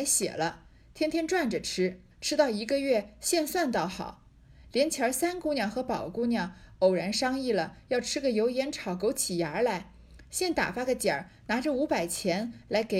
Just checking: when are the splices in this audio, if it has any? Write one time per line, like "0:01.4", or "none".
0:02.1